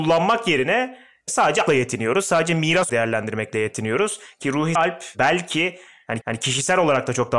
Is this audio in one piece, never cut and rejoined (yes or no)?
no